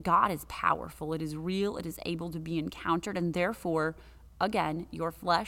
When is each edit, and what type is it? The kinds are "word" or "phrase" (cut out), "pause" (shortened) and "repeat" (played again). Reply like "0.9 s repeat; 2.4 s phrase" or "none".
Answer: none